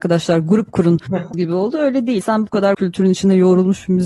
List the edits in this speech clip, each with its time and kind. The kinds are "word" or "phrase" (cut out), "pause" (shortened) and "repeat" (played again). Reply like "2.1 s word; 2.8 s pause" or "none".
1.3 s word; 2.2 s word; 2.7 s word